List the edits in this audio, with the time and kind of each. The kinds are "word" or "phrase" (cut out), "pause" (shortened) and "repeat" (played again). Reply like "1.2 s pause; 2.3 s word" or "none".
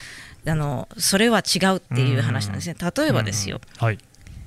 1.9 s pause